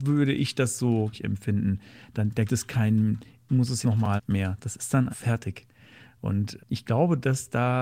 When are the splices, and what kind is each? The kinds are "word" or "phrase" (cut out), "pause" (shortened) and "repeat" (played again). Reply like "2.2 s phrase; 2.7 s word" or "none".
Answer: 1.1 s word; 2.5 s word; 3.5 s word; 3.8 s word; 4.2 s word; 5.1 s word; 6.6 s word